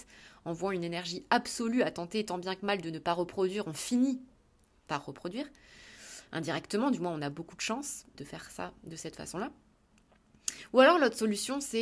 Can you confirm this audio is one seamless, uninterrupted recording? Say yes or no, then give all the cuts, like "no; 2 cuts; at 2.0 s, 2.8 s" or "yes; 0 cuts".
no; 1 cut; at 8.1 s